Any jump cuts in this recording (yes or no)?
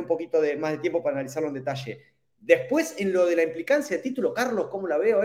no